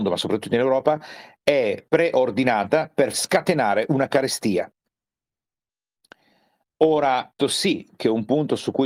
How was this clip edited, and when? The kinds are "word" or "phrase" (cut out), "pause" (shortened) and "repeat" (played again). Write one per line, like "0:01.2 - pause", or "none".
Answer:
0:01.9 - pause
0:03.1 - word
0:07.4 - word